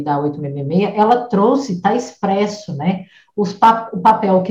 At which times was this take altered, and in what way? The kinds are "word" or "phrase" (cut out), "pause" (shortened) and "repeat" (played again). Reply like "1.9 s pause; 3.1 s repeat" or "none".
none